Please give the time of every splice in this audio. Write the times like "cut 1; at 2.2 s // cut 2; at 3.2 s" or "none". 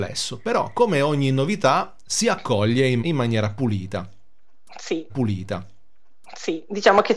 cut 1; at 3.0 s // cut 2; at 5.1 s